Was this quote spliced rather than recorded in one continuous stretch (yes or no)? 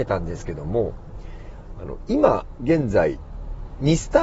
no